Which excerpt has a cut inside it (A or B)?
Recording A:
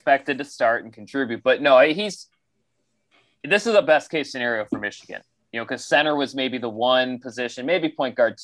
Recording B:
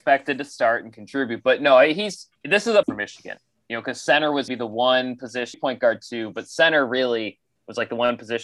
B